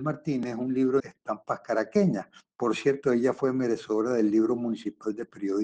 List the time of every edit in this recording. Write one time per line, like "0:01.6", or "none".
0:01.0